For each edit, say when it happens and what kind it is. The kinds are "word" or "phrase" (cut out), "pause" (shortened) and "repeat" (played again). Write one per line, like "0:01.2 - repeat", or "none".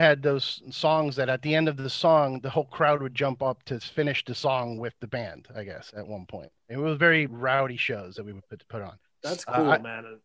0:06.6 - pause
0:07.3 - word